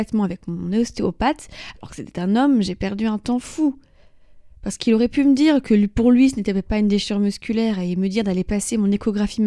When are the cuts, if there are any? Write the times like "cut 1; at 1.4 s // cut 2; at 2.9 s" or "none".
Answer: cut 1; at 4.6 s